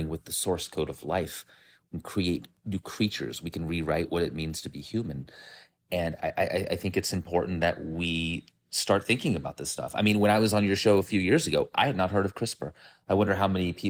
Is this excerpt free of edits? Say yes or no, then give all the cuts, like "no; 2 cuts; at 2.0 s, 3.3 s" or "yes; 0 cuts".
yes; 0 cuts